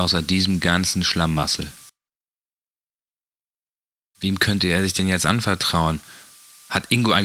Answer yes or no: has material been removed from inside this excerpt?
no